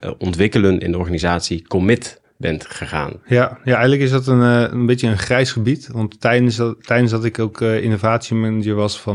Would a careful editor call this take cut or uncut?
uncut